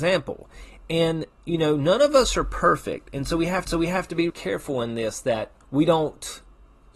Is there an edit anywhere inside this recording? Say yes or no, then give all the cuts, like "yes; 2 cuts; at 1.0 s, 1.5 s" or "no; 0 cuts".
yes; 3 cuts; at 3.7 s, 4.3 s, 5.6 s